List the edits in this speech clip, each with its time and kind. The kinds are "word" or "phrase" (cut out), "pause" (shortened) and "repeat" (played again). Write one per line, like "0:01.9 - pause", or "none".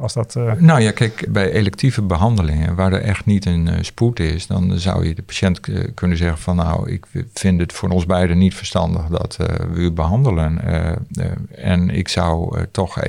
0:01.3 - word